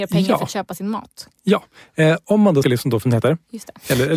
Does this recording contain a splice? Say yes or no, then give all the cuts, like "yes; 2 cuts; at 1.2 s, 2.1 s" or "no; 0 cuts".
yes; 2 cuts; at 2.6 s, 3.0 s